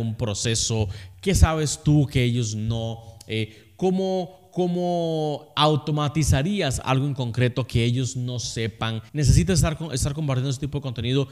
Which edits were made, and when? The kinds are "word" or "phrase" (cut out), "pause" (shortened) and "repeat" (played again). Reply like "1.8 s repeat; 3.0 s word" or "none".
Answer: 9.1 s pause